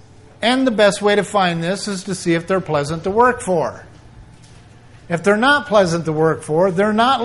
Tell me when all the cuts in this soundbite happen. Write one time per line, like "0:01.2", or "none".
none

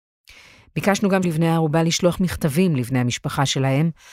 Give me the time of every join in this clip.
0:01.2

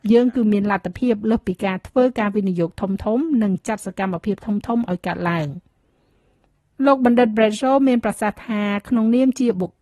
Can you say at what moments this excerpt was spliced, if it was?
none

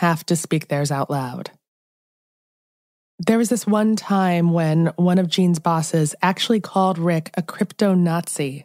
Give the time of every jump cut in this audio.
none

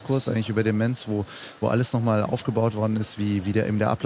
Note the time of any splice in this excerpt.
none

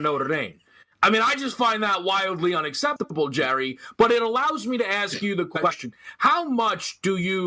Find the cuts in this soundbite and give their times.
none

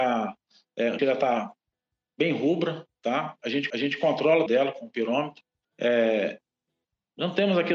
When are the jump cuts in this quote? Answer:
0:01.0
0:03.7
0:04.5
0:05.6

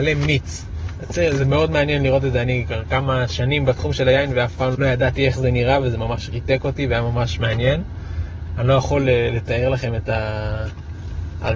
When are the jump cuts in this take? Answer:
0:04.7

